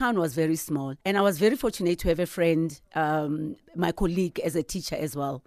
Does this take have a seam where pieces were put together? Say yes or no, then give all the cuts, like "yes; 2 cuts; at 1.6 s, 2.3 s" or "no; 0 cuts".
yes; 1 cut; at 1.0 s